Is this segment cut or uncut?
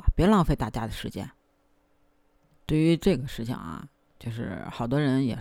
uncut